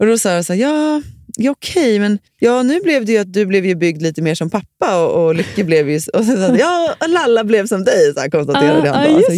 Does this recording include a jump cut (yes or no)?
yes